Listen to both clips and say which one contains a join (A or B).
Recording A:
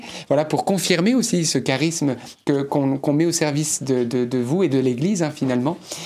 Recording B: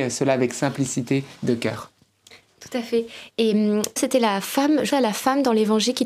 B